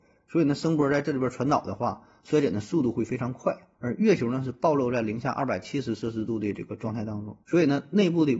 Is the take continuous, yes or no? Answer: no